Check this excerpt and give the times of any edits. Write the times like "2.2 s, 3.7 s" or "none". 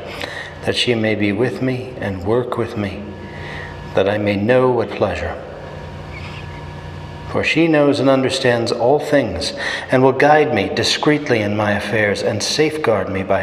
4.8 s

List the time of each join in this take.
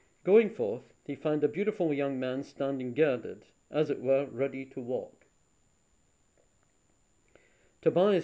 none

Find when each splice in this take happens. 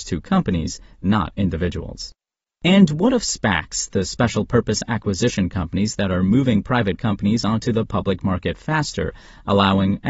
none

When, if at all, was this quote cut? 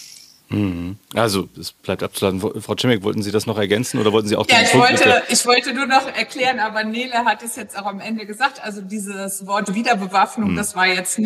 1.8 s

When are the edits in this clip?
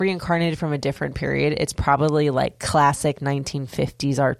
none

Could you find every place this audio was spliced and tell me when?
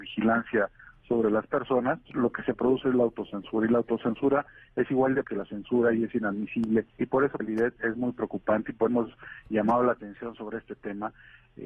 2.1 s, 5.2 s, 6.9 s, 7.4 s, 7.8 s, 8.9 s

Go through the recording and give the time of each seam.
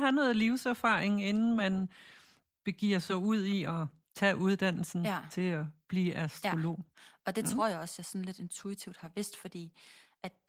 none

